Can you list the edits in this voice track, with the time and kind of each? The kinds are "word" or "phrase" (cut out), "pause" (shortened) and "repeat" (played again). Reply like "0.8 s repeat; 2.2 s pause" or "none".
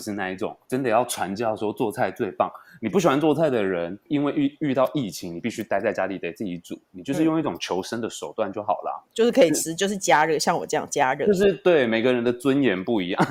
9.0 s word